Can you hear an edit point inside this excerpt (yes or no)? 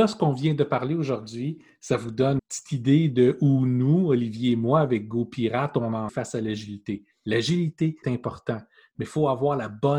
yes